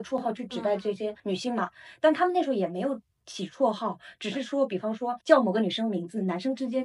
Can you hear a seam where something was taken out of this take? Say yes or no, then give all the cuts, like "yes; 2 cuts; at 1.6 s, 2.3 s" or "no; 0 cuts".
yes; 2 cuts; at 1.2 s, 5.2 s